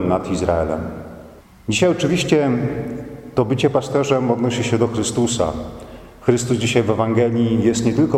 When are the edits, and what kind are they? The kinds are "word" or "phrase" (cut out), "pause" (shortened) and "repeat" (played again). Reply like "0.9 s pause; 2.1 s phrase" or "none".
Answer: 1.4 s pause